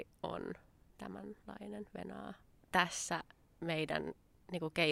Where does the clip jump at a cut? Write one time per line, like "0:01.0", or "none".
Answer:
none